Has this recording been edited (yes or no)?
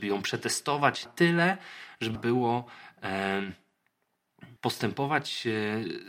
yes